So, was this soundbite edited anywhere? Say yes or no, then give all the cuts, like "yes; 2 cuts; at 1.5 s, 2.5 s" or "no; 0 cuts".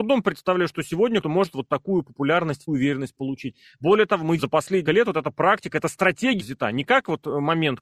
yes; 5 cuts; at 1.2 s, 2.7 s, 4.4 s, 4.9 s, 6.4 s